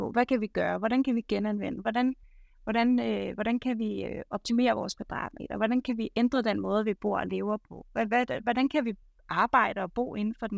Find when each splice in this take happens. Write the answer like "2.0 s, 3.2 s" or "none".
none